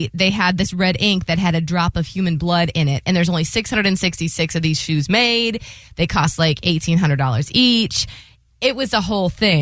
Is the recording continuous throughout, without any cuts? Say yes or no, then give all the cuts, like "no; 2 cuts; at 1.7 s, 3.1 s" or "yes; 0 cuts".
yes; 0 cuts